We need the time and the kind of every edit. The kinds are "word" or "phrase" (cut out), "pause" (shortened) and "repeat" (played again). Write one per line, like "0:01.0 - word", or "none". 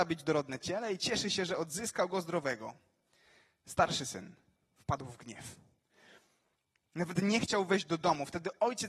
none